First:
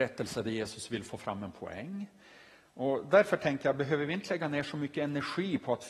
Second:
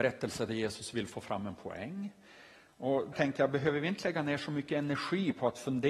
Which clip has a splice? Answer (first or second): second